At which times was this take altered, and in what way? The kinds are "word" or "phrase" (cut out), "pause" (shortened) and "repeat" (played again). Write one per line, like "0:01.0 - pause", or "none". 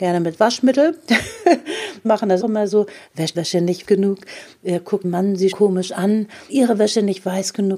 0:02.0 - word
0:02.4 - word
0:03.3 - word
0:03.8 - word
0:05.0 - word
0:05.5 - word
0:06.5 - word

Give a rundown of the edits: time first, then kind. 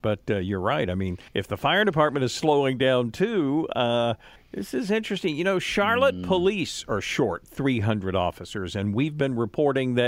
0:01.3 - pause
0:04.4 - pause

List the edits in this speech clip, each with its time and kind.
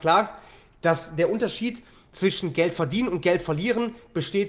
none

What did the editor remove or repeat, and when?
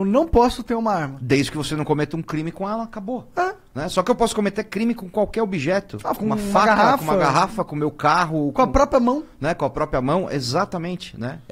0:06.2 - word

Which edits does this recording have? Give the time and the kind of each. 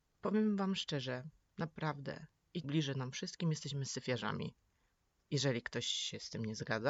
0:02.6 - word

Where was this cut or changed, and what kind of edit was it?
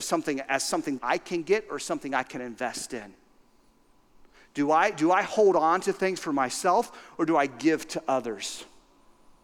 0:01.0 - word

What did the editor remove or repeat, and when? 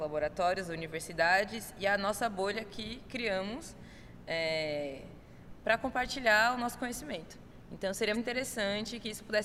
0:08.1 - word

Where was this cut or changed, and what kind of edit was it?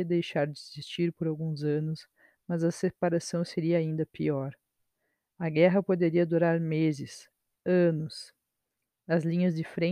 none

